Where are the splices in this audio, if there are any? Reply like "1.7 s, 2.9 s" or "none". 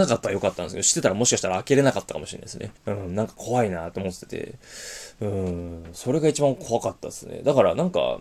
2.8 s